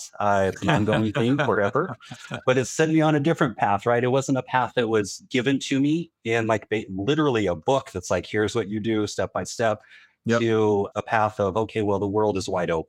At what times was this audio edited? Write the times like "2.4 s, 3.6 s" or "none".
none